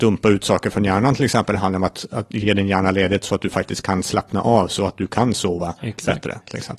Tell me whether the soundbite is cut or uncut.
uncut